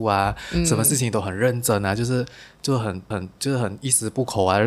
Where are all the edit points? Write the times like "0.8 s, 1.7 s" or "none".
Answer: 3.1 s